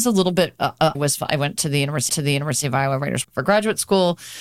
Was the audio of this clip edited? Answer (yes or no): yes